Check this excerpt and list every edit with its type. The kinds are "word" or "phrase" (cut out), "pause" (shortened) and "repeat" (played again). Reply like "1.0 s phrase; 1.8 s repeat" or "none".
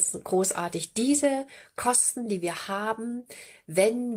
none